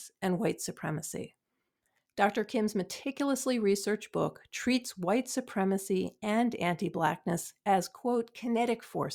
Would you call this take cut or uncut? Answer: uncut